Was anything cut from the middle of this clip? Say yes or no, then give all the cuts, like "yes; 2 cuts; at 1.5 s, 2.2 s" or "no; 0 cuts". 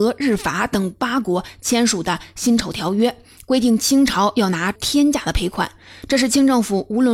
no; 0 cuts